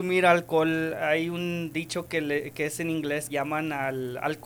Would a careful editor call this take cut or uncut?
cut